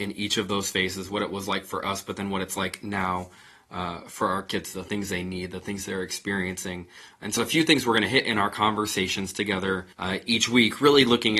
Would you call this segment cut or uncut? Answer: cut